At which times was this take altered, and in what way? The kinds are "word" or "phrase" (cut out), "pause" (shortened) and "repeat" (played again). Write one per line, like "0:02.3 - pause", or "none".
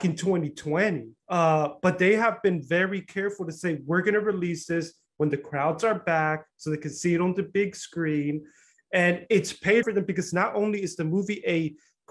0:01.2 - pause
0:09.8 - phrase